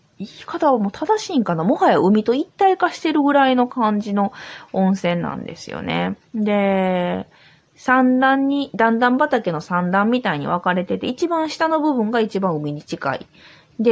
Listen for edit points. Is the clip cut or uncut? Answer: cut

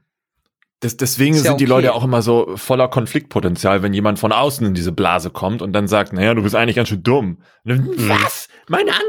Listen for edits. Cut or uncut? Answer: uncut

